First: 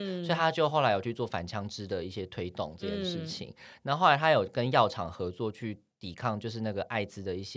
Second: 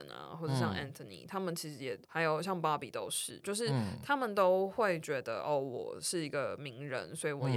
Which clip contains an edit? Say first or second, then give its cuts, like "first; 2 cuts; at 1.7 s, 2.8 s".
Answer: second; 1 cut; at 2.0 s